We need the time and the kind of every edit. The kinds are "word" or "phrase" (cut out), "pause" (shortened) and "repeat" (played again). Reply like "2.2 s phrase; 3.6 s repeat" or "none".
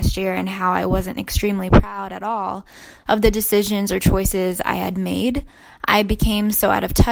none

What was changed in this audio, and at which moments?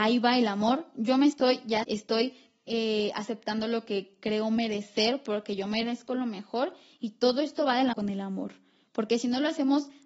1.8 s word; 7.9 s word

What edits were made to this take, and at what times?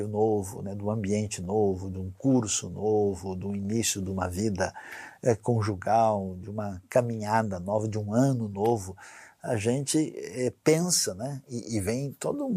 none

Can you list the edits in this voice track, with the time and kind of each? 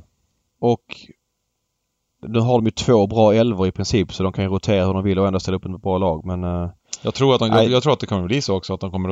none

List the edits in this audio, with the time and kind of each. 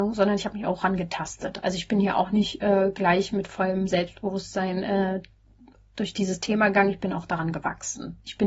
none

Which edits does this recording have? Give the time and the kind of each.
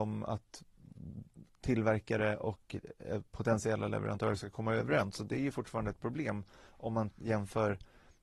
none

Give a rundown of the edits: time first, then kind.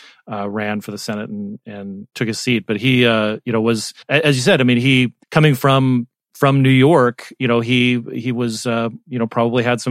4.0 s pause; 5.2 s pause

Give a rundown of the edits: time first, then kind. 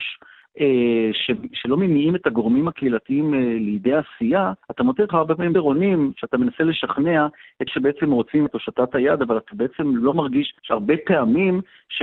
1.5 s word; 4.6 s pause; 5.1 s word; 5.5 s word; 7.7 s word; 8.5 s word; 10.6 s pause

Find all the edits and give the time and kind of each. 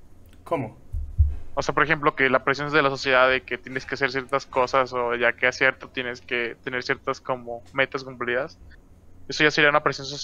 5.8 s word

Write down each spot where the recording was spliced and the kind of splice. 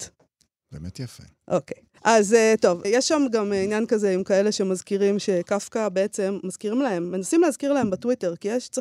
2.0 s pause; 2.8 s word

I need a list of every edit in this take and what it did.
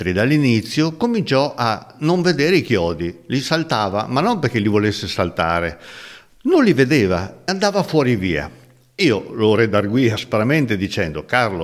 7.5 s word

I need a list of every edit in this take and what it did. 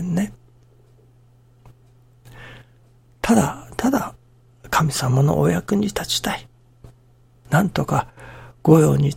none

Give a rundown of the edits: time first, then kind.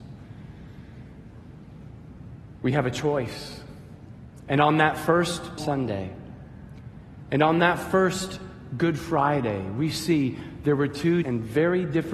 5.6 s word; 11.2 s word

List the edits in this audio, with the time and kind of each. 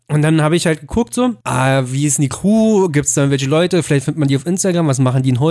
1.4 s pause

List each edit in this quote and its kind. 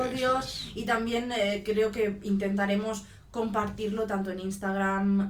none

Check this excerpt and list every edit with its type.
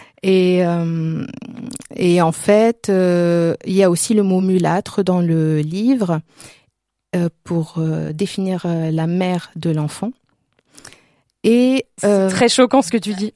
none

